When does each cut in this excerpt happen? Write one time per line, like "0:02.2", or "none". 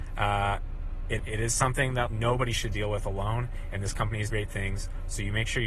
0:01.2
0:02.1
0:02.6
0:04.3

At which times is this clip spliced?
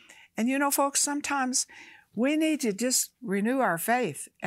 none

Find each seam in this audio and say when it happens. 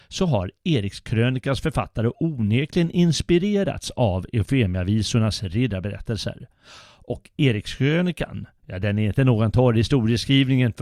none

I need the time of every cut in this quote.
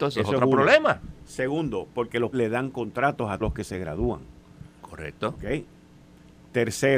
0:02.3
0:03.4

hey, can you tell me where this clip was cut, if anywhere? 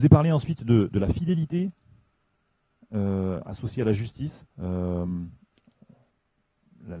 0:04.5

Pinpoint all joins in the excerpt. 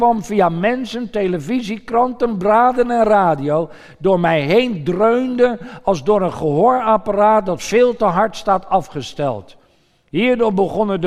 none

